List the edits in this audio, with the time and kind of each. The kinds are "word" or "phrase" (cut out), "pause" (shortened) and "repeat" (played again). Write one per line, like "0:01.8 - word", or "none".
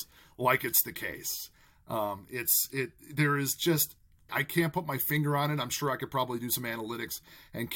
0:04.3 - word